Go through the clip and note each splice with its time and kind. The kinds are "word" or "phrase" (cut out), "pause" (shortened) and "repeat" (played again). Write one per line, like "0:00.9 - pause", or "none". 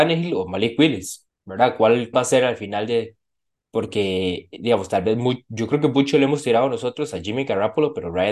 0:02.1 - word